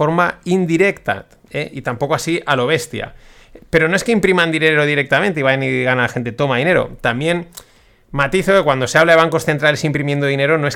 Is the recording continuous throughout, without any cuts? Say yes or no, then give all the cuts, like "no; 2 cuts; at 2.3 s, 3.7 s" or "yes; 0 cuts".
yes; 0 cuts